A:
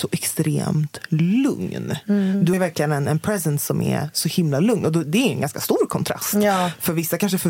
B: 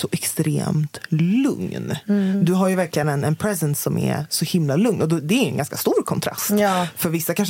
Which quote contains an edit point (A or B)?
A